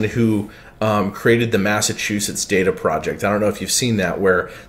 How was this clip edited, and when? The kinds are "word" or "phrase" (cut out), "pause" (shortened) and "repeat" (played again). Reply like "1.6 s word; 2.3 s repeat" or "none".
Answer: none